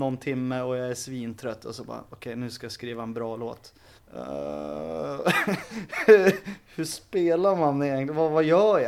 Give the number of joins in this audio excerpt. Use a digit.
1